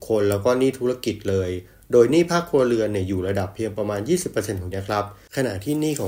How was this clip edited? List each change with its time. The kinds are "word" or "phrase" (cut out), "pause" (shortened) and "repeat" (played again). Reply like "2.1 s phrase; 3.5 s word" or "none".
4.7 s word